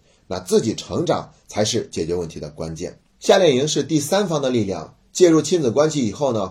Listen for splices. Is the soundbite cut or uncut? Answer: cut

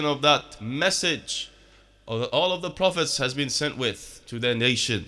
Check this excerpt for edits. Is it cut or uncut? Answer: uncut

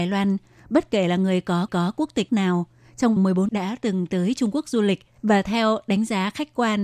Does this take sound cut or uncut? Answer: cut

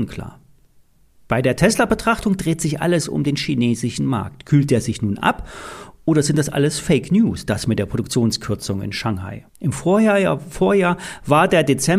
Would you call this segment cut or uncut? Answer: cut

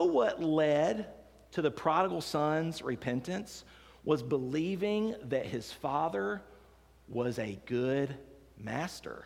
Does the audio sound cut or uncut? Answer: uncut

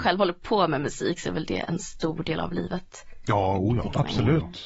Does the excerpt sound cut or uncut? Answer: uncut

